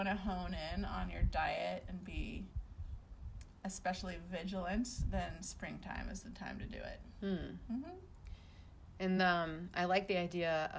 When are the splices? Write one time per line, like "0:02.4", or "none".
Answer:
none